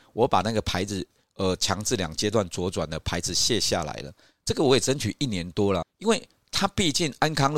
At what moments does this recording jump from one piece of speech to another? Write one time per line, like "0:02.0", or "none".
0:05.8